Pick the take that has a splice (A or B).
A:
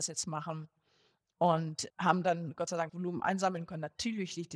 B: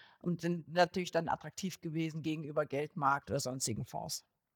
A